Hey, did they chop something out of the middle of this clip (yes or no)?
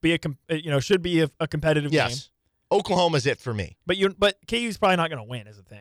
no